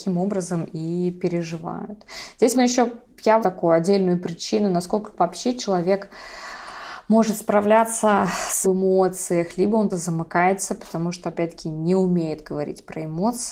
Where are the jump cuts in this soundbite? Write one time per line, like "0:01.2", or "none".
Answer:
0:02.5
0:03.4
0:08.6
0:09.9